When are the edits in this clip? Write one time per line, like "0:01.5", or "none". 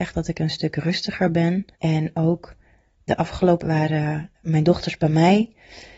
0:01.7
0:03.1
0:03.6
0:04.3